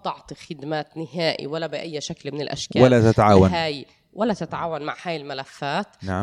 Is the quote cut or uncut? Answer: uncut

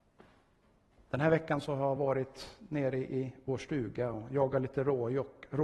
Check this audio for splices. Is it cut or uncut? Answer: uncut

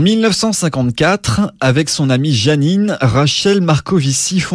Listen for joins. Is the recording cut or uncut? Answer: uncut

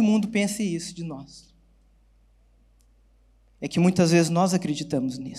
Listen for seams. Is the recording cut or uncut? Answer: uncut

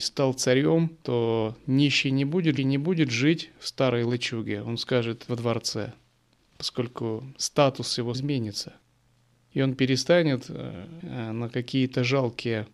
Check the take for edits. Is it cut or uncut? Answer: cut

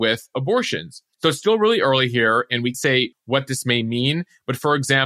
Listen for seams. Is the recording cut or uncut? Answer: cut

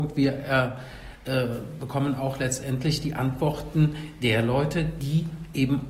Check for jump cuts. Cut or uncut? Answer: uncut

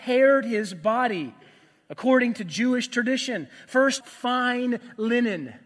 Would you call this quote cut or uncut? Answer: cut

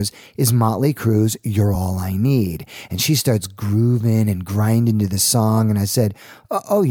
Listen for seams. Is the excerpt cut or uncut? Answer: uncut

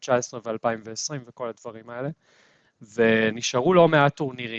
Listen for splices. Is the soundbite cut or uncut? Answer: uncut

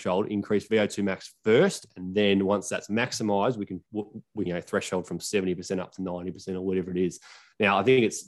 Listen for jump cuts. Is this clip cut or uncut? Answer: cut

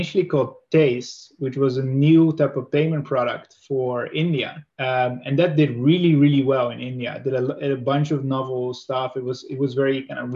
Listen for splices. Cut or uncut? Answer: cut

